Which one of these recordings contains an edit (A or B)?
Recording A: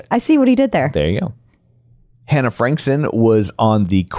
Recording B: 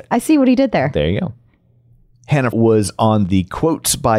B